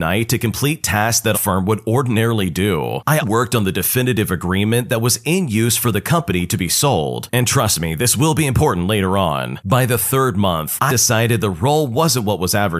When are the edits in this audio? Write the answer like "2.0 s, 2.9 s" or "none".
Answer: 1.3 s, 3.2 s, 10.9 s

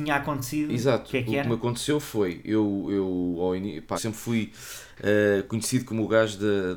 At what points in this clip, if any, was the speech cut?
3.9 s

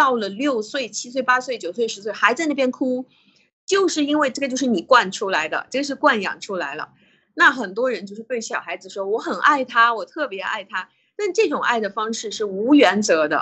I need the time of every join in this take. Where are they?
none

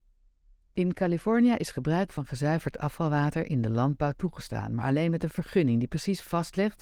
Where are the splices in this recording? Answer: none

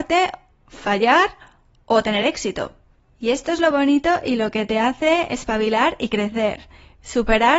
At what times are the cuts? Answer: none

